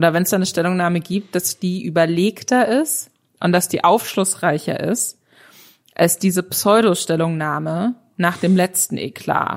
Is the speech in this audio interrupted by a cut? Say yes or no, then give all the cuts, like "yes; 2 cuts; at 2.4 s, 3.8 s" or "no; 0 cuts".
no; 0 cuts